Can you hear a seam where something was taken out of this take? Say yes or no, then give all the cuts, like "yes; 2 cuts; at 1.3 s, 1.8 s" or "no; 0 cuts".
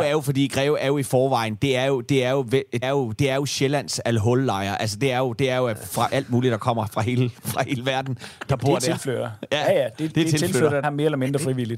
yes; 2 cuts; at 2.8 s, 10.8 s